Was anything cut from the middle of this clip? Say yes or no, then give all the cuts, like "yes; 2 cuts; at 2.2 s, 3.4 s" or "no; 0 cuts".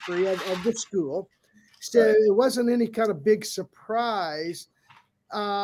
no; 0 cuts